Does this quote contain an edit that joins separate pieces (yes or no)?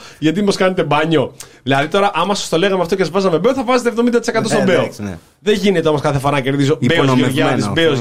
no